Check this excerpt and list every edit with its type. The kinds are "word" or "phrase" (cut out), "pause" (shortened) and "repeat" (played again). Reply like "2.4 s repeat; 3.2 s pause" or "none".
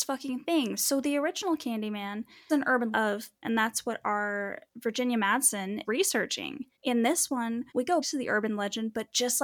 2.5 s word; 2.9 s word; 3.4 s word; 4.7 s pause; 5.8 s word; 6.7 s pause; 7.7 s pause; 8.0 s word